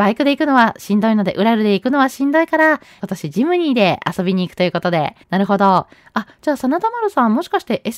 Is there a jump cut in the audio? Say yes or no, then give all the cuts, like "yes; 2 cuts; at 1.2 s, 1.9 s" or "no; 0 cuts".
yes; 2 cuts; at 3.0 s, 5.2 s